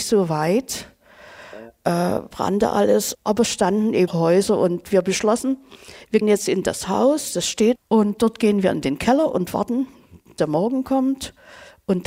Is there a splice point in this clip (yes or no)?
yes